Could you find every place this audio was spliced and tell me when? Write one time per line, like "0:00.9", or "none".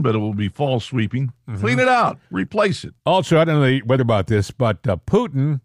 0:02.2
0:03.0
0:04.0